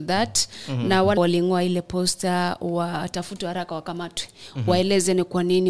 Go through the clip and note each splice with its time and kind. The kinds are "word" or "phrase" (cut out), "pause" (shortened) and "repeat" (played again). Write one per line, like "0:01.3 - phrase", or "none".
0:01.2 - word